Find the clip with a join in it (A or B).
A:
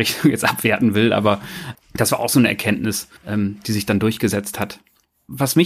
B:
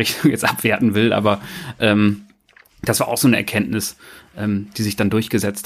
A